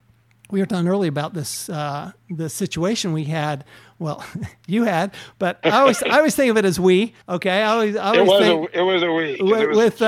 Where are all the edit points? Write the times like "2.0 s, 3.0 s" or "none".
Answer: 5.6 s, 7.2 s